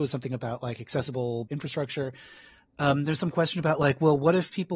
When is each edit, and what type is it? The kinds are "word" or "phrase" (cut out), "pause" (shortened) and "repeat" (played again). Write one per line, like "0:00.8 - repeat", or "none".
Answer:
0:01.5 - phrase